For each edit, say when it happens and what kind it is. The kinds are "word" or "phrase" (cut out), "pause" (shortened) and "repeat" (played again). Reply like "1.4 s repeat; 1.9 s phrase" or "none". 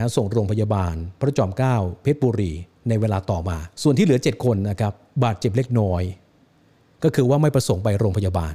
3.7 s pause